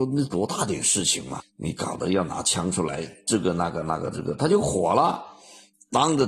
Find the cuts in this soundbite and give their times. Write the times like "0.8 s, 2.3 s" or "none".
1.4 s